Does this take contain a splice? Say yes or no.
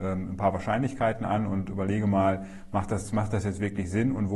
no